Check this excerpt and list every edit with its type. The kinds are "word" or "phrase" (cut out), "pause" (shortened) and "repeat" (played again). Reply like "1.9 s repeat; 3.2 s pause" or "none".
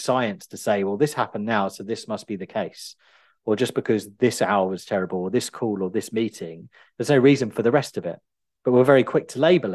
none